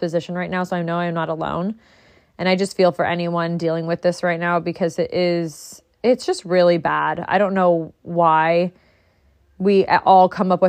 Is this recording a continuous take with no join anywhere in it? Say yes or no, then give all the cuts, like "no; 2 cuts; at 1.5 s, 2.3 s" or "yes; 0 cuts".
yes; 0 cuts